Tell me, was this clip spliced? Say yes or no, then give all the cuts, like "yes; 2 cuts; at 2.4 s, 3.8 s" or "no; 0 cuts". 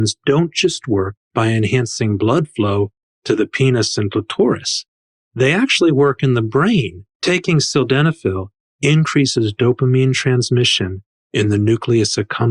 no; 0 cuts